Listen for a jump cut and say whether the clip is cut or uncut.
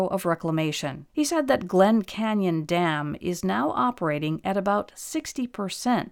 cut